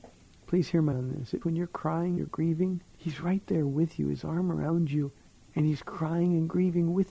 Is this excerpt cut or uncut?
cut